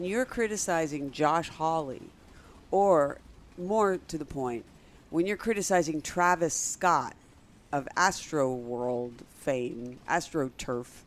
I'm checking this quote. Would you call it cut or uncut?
uncut